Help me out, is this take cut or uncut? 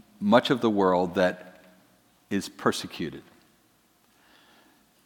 uncut